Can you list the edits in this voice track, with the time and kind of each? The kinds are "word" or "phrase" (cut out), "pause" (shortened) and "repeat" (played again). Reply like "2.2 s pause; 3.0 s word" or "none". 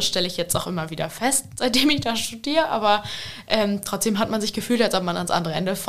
none